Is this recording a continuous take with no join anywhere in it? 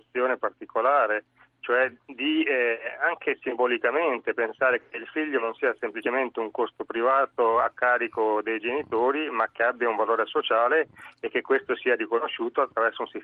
yes; 0 cuts

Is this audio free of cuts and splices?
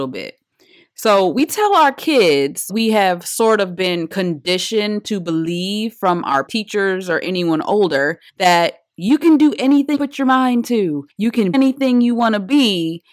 no; 6 cuts; at 2.7 s, 6.5 s, 8.3 s, 9.9 s, 11.1 s, 11.5 s

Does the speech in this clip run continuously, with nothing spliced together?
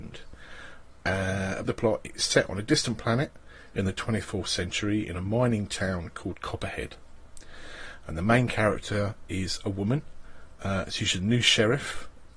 no; 1 cut; at 1.7 s

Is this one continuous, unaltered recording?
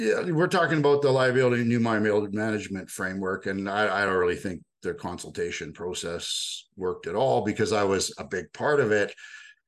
yes; 0 cuts

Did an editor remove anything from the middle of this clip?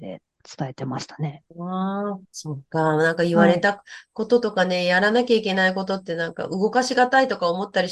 yes; 2 cuts; at 1.5 s, 2.2 s

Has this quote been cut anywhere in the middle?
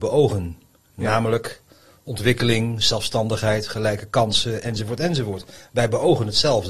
no; 0 cuts

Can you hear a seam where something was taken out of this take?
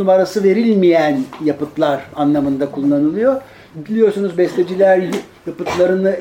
no; 0 cuts

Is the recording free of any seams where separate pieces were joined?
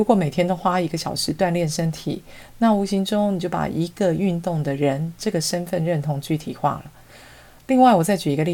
yes; 0 cuts

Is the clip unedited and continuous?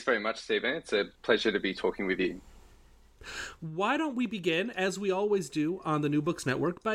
yes; 0 cuts

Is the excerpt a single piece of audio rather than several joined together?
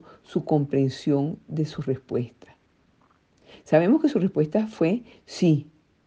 yes; 0 cuts

